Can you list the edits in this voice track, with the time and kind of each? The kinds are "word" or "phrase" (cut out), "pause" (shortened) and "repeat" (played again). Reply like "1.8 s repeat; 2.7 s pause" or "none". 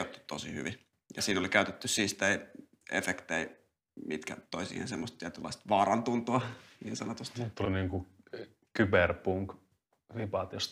7.6 s word